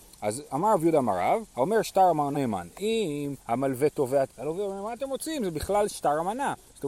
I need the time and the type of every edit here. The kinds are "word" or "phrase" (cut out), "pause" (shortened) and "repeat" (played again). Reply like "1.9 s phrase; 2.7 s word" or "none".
1.5 s pause; 2.3 s phrase; 3.4 s pause; 4.3 s word